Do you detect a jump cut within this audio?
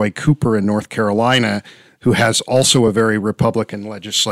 no; 0 cuts

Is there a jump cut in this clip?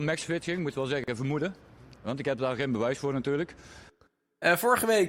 no; 0 cuts

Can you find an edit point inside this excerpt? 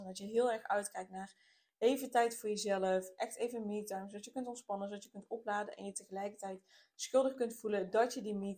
no; 0 cuts

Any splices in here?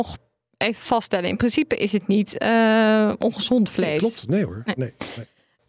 no; 0 cuts

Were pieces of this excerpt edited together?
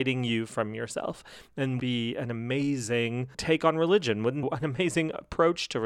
yes; 2 cuts; at 1.8 s, 4.4 s

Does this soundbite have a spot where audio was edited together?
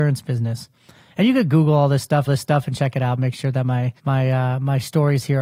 yes; 2 cuts; at 2.3 s, 4.0 s

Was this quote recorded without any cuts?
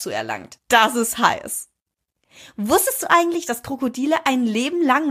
yes; 0 cuts

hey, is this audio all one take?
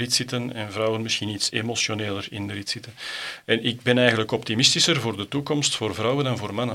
yes; 0 cuts

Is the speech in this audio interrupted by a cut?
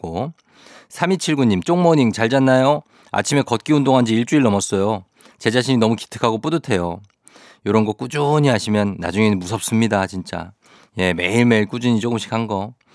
no; 0 cuts

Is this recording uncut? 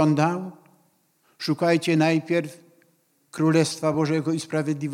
yes; 0 cuts

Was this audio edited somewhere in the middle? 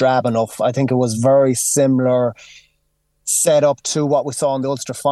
no; 0 cuts

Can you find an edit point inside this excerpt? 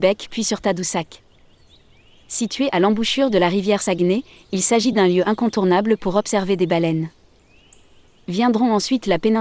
no; 0 cuts

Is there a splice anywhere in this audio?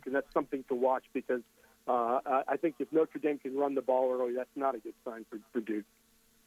no; 0 cuts

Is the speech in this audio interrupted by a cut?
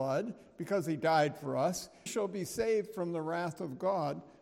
yes; 1 cut; at 2.1 s

